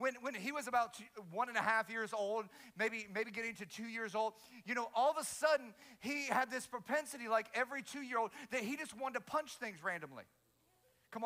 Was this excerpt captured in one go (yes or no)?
yes